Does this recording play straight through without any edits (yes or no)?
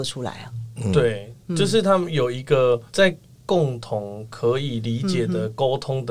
no